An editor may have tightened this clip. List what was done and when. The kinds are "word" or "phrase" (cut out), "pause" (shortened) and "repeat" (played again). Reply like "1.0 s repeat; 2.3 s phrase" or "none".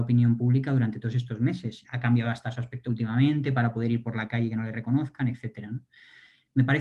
1.8 s word; 2.8 s word